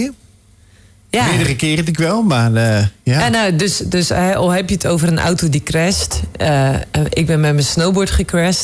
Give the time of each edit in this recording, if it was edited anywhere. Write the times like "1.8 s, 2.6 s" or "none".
1.9 s